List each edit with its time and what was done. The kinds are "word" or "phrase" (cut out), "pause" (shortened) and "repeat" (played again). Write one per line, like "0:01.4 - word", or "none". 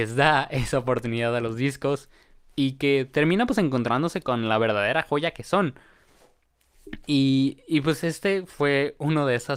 none